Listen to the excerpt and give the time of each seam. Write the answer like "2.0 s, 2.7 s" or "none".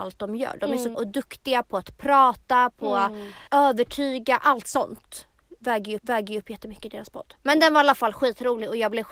0.9 s, 3.5 s, 6.0 s